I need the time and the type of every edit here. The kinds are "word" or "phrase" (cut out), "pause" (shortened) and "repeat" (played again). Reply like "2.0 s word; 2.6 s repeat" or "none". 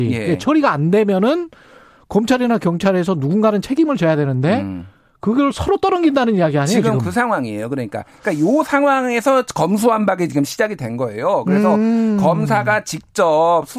none